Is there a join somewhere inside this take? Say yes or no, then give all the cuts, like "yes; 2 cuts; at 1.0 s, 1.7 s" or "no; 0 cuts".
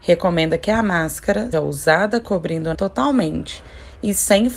yes; 2 cuts; at 1.5 s, 2.7 s